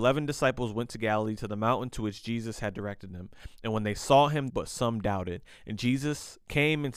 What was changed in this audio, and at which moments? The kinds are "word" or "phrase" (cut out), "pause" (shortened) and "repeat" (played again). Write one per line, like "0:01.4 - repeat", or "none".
0:04.5 - phrase